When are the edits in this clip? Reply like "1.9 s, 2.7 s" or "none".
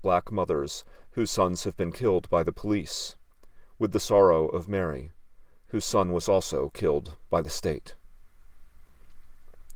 none